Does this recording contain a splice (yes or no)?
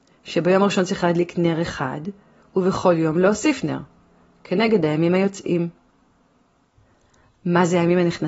no